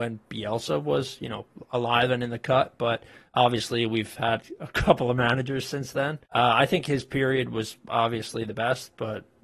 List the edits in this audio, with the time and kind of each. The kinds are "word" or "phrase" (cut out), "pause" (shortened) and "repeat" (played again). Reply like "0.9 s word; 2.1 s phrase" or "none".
6.3 s pause